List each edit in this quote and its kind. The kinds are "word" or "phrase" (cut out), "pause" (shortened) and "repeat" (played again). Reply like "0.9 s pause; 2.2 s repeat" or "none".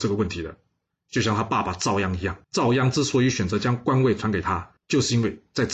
2.4 s pause; 4.8 s pause

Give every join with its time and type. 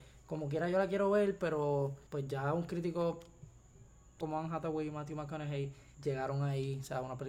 2.1 s pause; 4.2 s word; 5.9 s pause

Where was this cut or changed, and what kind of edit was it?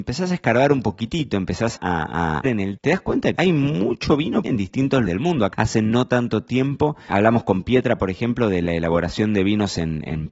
1.7 s word; 2.4 s word; 2.8 s word; 3.3 s word; 4.4 s word; 5.1 s word; 5.5 s word; 7.1 s word

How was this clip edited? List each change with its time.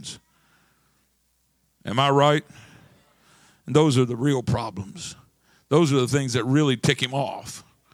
none

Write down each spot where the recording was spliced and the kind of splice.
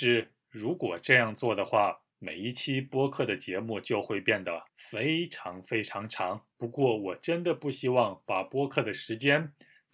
2.1 s pause; 4.7 s pause; 6.5 s pause

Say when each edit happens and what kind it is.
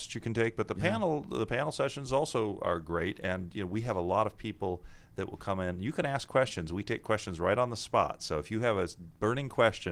none

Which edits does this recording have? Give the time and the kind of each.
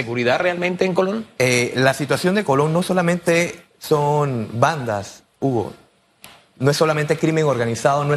none

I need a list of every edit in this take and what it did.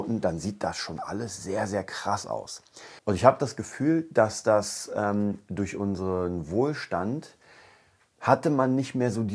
3.0 s pause

